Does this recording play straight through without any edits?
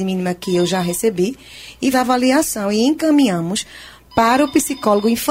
no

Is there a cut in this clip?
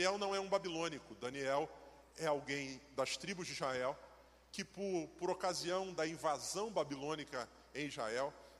no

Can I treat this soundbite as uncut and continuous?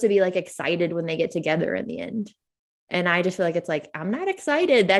yes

